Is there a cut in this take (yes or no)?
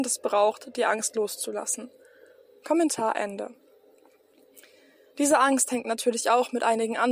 no